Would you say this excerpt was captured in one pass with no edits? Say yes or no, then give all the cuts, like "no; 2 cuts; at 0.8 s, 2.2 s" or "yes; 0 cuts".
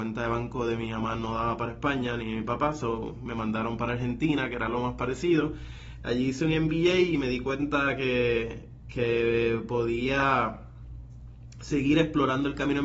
yes; 0 cuts